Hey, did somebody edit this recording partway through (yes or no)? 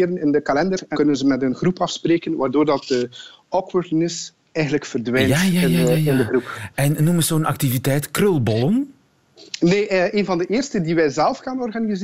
yes